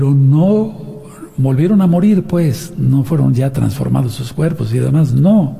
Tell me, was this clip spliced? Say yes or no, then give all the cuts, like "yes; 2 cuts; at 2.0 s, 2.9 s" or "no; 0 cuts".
no; 0 cuts